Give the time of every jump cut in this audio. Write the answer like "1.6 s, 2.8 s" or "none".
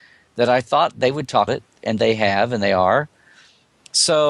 1.5 s